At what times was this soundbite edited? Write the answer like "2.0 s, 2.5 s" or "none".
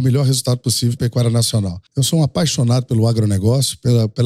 1.0 s, 1.9 s